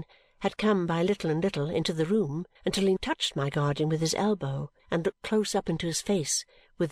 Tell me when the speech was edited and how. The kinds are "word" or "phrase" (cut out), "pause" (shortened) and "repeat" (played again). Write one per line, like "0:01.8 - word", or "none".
0:02.6 - pause
0:03.0 - word
0:04.8 - pause

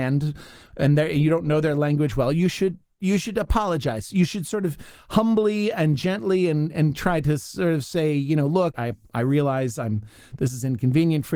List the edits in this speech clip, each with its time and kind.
0:08.7 - word

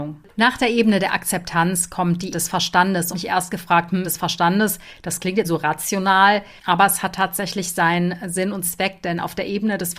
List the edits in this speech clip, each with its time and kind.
0:02.3 - word
0:03.1 - phrase
0:04.0 - word
0:05.4 - word
0:08.6 - word

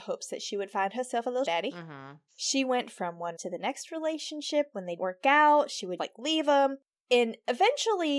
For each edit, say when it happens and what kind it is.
0:01.5 - word
0:03.4 - word
0:05.0 - word
0:06.0 - word

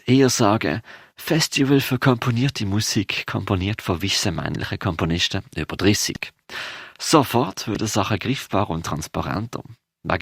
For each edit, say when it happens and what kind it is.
none

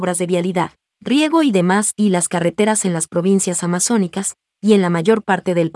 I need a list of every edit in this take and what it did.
none

